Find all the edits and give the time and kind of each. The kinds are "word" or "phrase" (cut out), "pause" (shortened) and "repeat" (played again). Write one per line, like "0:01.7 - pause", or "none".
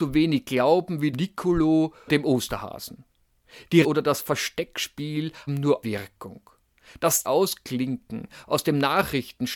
0:01.1 - word
0:02.1 - word
0:03.8 - word
0:05.5 - word
0:05.8 - word
0:07.2 - word